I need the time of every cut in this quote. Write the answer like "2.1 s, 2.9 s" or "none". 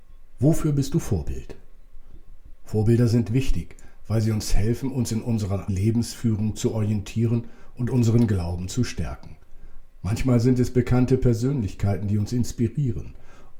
5.7 s